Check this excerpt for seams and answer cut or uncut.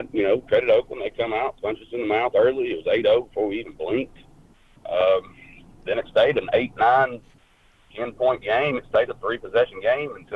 uncut